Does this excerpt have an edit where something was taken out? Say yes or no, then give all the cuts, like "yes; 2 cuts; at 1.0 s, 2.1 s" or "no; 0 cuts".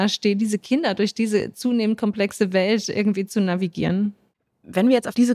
no; 0 cuts